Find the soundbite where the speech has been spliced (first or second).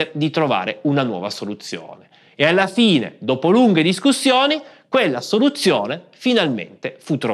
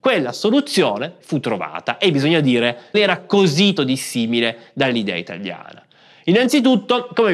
second